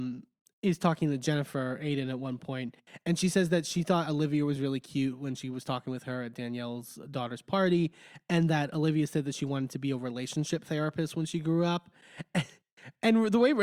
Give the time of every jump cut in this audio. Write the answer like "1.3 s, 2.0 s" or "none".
none